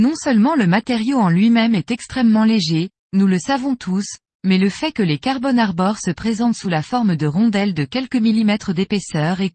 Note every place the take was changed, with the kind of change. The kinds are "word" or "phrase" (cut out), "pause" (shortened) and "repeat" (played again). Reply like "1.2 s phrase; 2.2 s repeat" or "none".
none